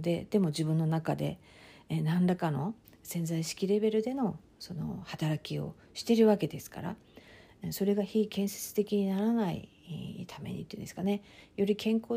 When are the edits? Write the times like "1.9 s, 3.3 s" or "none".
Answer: none